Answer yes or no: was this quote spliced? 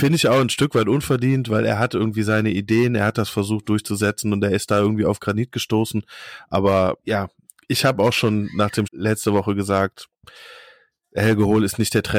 yes